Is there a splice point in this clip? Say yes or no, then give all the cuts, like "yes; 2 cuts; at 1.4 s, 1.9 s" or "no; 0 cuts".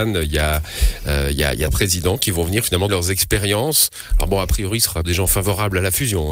yes; 3 cuts; at 1.7 s, 2.9 s, 5.0 s